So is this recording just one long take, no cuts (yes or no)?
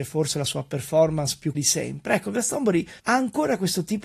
no